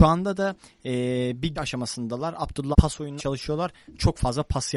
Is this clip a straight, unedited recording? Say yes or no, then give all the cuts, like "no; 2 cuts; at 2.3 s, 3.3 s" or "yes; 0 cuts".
no; 3 cuts; at 1.6 s, 2.7 s, 3.2 s